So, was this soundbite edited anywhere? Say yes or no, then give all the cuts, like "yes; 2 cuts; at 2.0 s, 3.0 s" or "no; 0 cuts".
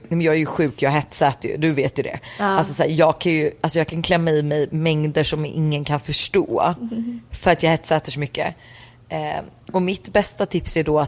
no; 0 cuts